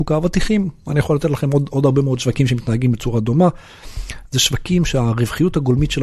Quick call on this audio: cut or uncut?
uncut